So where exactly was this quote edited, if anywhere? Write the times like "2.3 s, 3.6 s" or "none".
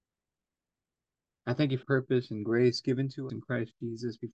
1.8 s, 3.3 s